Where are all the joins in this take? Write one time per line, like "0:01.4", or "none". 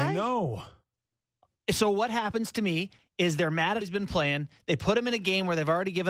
0:03.8